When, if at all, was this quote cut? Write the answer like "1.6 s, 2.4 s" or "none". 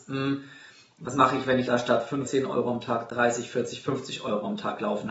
1.7 s, 2.2 s